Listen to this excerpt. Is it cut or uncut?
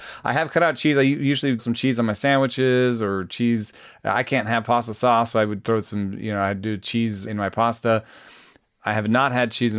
cut